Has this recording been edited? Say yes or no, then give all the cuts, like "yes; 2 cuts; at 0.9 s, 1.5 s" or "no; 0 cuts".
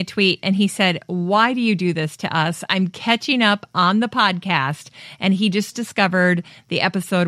no; 0 cuts